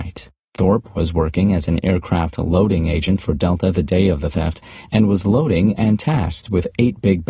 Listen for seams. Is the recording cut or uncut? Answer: uncut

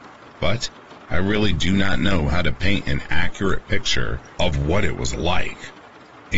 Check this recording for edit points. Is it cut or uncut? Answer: uncut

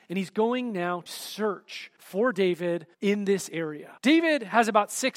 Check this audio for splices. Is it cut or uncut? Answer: cut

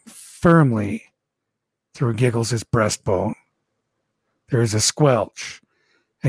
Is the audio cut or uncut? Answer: uncut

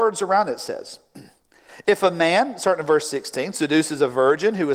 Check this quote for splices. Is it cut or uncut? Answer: uncut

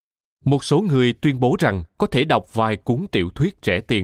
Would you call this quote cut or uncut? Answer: uncut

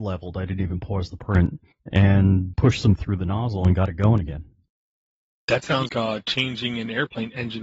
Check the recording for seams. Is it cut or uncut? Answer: cut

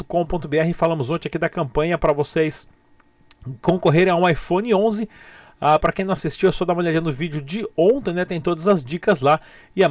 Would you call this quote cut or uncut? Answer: uncut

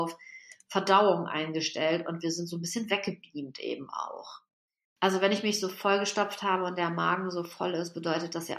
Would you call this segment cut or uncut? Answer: uncut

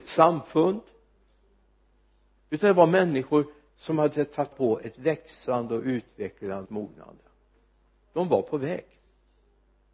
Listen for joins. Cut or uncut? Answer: cut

